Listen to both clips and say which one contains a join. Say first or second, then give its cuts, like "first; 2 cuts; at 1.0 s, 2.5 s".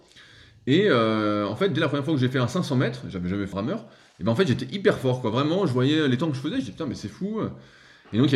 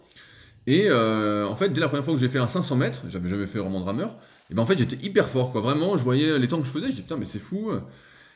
first; 1 cut; at 3.5 s